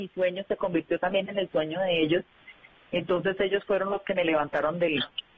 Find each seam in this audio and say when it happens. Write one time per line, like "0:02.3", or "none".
none